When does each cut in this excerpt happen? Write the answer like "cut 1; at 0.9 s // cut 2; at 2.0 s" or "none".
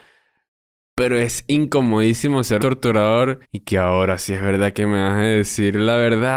cut 1; at 2.6 s // cut 2; at 3.4 s